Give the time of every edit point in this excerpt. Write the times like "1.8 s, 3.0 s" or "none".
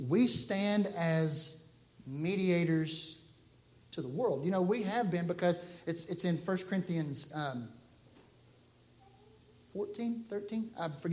none

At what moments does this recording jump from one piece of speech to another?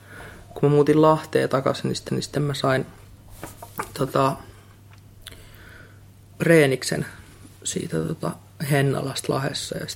2.1 s, 7.6 s

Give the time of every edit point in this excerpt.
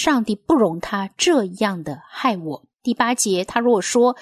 2.7 s

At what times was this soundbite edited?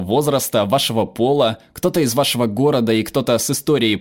none

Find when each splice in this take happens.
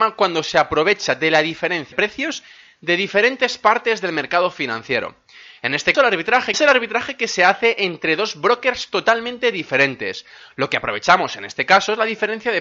1.9 s, 5.9 s, 6.5 s

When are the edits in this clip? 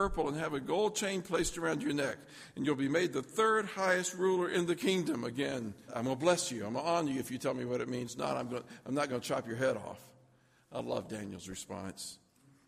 5.9 s

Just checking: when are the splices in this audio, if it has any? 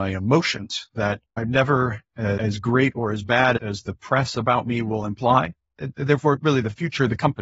1.2 s

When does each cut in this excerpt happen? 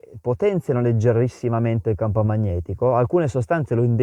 none

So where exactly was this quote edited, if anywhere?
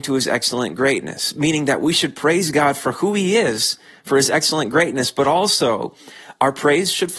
none

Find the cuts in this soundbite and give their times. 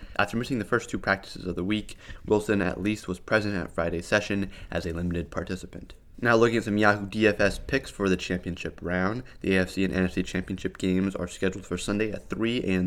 none

